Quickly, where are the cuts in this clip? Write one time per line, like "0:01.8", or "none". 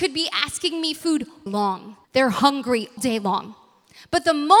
0:01.0
0:01.5
0:02.0
0:03.0